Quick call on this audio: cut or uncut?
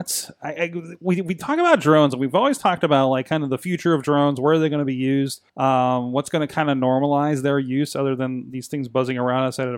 cut